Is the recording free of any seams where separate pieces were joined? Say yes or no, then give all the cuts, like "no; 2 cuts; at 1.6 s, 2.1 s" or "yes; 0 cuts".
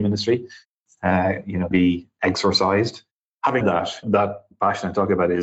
no; 3 cuts; at 1.7 s, 3.6 s, 4.0 s